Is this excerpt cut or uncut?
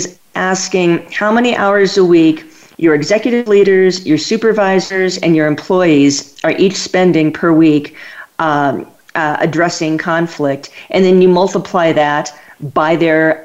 uncut